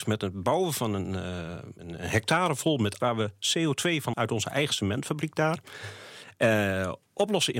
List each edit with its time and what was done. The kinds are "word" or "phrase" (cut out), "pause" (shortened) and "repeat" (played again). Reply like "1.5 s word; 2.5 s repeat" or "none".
1.8 s word; 3.0 s word; 4.1 s word